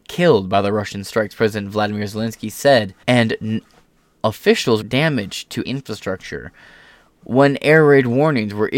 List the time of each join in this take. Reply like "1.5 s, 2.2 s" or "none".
3.0 s, 4.8 s, 5.6 s